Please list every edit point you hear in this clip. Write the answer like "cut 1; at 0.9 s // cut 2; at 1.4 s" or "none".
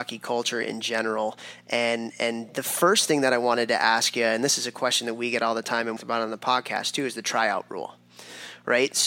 cut 1; at 6.0 s